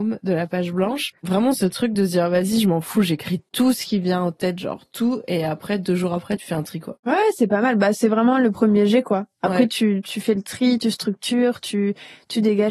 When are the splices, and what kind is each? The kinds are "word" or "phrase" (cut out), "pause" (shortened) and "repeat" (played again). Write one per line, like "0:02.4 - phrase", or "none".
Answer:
0:01.2 - pause
0:07.0 - pause